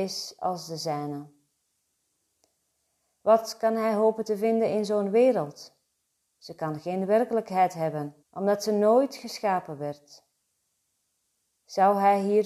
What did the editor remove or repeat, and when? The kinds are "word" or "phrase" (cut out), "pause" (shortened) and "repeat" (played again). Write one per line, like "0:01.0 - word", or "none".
0:08.2 - pause